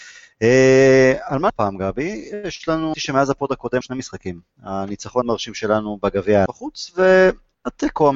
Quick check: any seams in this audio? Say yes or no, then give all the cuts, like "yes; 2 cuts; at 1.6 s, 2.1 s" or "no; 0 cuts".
yes; 5 cuts; at 1.5 s, 2.9 s, 3.8 s, 5.2 s, 6.5 s